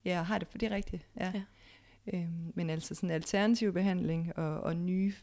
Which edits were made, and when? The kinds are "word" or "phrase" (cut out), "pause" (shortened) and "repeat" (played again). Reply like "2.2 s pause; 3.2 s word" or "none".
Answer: none